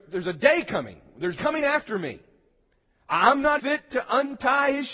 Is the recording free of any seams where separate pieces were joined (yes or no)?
no